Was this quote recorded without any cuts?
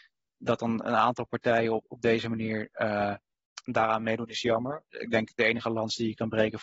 yes; 0 cuts

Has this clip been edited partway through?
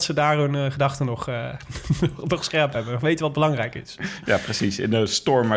no; 0 cuts

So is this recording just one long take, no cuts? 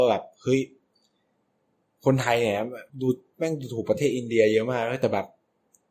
no; 1 cut; at 2.9 s

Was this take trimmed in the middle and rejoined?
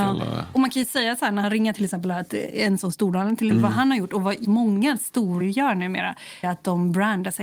yes; 8 cuts; at 1.4 s, 1.7 s, 2.3 s, 2.8 s, 3.5 s, 4.4 s, 5.4 s, 6.4 s

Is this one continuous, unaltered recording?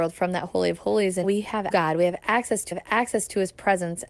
no; 3 cuts; at 1.2 s, 1.7 s, 2.7 s

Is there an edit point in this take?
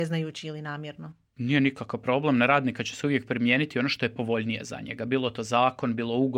no; 0 cuts

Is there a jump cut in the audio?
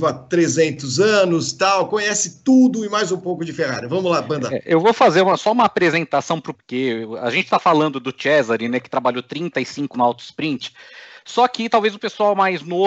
yes; 2 cuts; at 6.5 s, 9.9 s

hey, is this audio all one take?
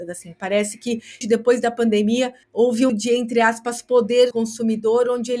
no; 4 cuts; at 1.2 s, 2.4 s, 2.9 s, 4.3 s

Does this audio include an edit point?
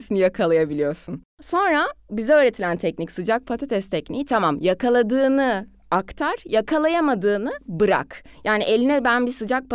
no; 0 cuts

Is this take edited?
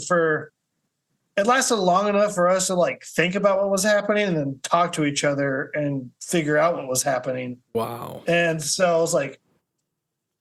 yes; 2 cuts; at 6.2 s, 7.6 s

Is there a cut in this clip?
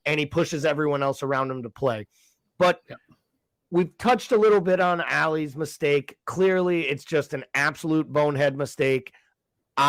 no; 0 cuts

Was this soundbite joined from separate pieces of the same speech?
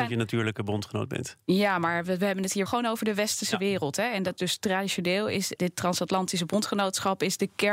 yes; 3 cuts; at 2.7 s, 4.4 s, 5.6 s

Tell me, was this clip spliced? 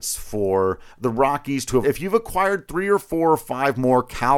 yes; 2 cuts; at 0.9 s, 1.8 s

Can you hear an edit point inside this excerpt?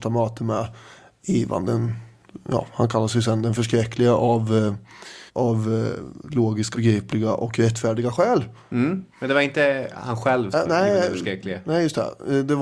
yes; 4 cuts; at 5.3 s, 6.7 s, 9.1 s, 10.5 s

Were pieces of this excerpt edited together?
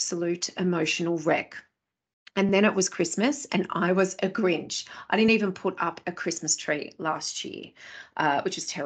no; 0 cuts

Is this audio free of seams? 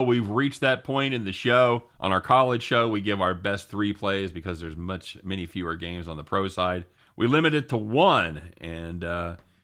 no; 2 cuts; at 1.9 s, 6.9 s

